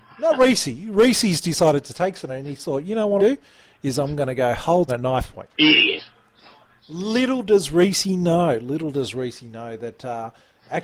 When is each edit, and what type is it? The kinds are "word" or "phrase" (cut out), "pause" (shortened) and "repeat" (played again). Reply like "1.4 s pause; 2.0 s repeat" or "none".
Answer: 2.3 s word; 3.2 s phrase; 4.9 s word; 5.5 s pause